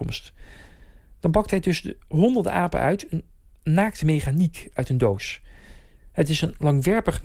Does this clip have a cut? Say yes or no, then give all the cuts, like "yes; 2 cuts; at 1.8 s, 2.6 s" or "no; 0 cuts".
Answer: no; 0 cuts